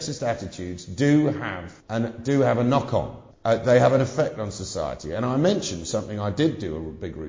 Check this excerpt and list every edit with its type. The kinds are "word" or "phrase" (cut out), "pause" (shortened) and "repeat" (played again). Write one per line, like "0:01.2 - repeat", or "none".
0:01.8 - pause
0:03.3 - pause